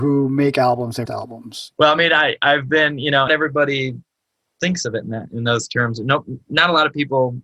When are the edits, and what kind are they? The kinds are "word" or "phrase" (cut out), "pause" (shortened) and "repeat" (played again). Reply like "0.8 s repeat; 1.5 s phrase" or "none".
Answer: 1.1 s phrase; 3.3 s phrase